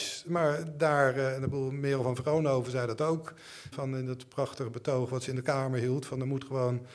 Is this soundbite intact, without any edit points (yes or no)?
no